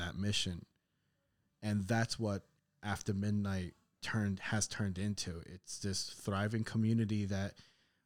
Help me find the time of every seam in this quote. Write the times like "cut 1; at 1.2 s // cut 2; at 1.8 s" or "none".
none